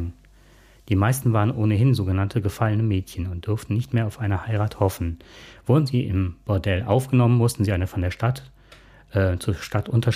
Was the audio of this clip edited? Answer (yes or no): no